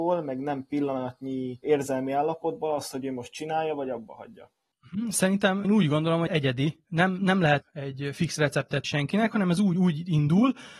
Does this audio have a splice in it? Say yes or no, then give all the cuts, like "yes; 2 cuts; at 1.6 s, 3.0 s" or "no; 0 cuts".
yes; 4 cuts; at 5.6 s, 6.3 s, 7.6 s, 8.8 s